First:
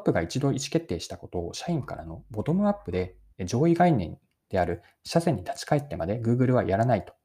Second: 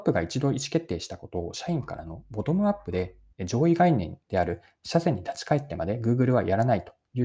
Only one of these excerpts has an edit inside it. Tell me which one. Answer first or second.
second